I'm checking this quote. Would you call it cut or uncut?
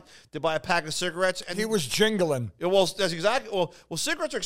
uncut